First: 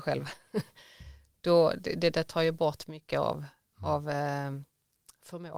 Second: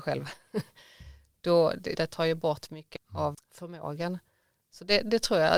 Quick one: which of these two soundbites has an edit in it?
second; 3 cuts; at 1.9 s, 3.0 s, 3.3 s

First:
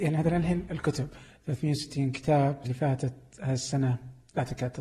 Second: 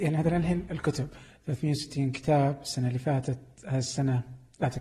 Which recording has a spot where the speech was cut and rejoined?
first; 1 cut; at 2.6 s

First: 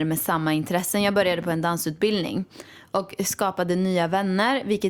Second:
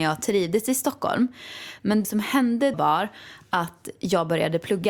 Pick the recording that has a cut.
second; 2 cuts; at 2.0 s, 2.7 s

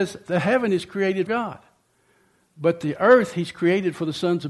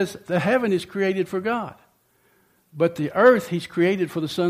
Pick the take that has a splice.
first; 1 cut; at 1.3 s

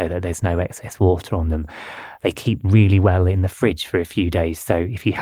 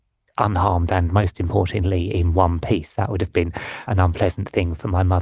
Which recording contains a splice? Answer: second; 1 cut; at 3.9 s

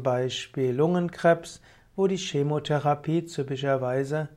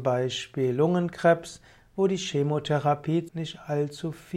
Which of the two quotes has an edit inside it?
second; 1 cut; at 3.3 s

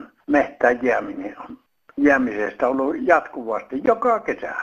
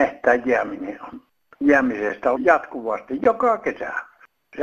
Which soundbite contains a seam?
second; 1 cut; at 2.4 s

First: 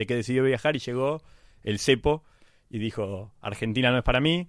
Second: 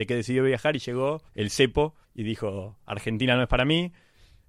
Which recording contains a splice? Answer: second; 2 cuts; at 1.3 s, 2.0 s

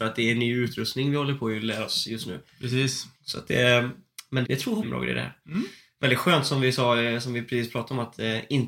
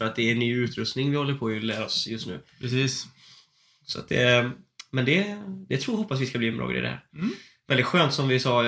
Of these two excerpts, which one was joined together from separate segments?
first; 3 cuts; at 3.1 s, 4.4 s, 4.8 s

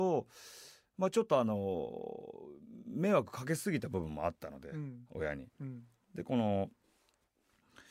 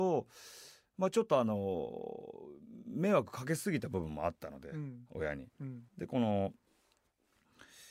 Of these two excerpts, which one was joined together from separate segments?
second; 1 cut; at 5.9 s

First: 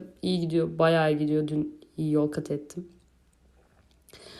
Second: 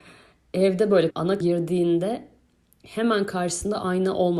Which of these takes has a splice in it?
second; 2 cuts; at 1.1 s, 1.4 s

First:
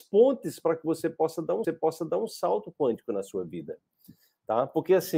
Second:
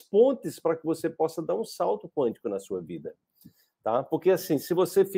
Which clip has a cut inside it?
first; 1 cut; at 1.6 s

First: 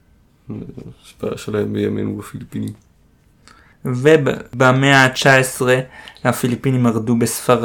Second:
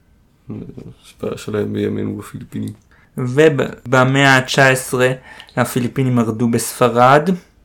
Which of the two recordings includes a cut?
second; 1 cut; at 2.9 s

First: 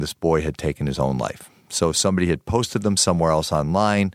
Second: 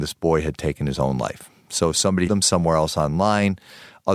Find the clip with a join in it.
second; 1 cut; at 2.3 s

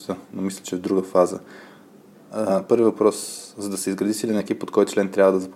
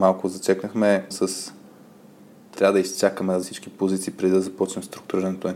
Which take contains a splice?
second; 3 cuts; at 1.1 s, 2.6 s, 3.4 s

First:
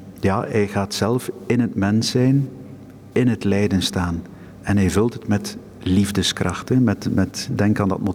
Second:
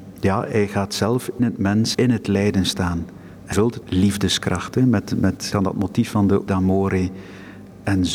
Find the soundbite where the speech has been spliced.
second; 6 cuts; at 1.4 s, 1.9 s, 3.5 s, 3.8 s, 5.5 s, 6.5 s

